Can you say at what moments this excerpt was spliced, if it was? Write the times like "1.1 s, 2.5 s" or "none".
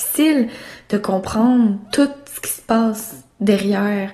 none